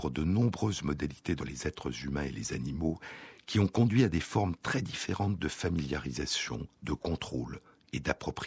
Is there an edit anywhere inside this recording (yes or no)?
yes